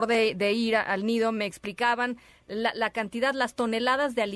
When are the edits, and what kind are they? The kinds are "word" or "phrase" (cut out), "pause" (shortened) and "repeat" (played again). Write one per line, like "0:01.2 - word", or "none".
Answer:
none